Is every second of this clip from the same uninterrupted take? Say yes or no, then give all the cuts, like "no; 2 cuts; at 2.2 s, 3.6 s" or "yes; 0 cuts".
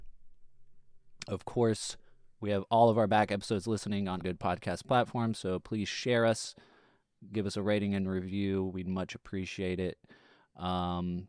no; 2 cuts; at 2.3 s, 4.2 s